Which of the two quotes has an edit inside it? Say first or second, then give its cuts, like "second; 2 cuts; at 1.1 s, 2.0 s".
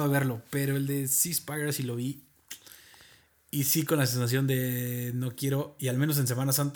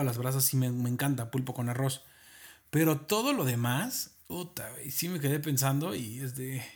second; 1 cut; at 4.2 s